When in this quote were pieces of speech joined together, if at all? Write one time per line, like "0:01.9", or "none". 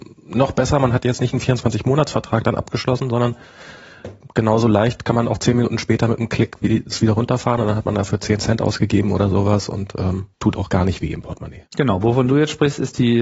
0:10.3
0:11.7